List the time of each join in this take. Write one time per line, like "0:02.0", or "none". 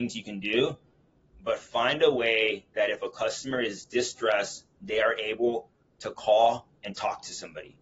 none